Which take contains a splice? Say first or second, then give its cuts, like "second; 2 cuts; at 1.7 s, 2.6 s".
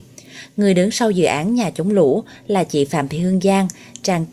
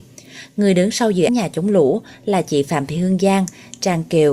second; 1 cut; at 1.3 s